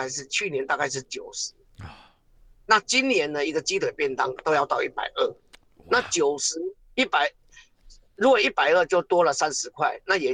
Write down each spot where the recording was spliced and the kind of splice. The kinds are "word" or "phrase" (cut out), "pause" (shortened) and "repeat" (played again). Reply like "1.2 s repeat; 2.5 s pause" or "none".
none